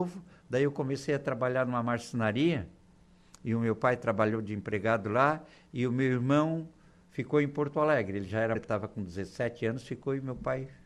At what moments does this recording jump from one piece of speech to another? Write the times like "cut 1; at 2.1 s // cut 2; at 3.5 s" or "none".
cut 1; at 8.6 s